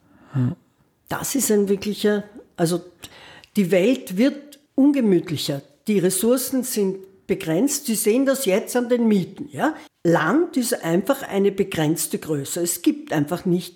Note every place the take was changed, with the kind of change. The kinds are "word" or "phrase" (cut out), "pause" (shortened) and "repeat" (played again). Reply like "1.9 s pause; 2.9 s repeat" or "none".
4.7 s pause; 9.9 s pause

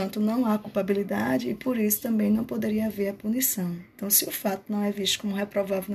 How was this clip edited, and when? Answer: none

